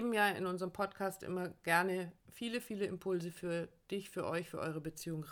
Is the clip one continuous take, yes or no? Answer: no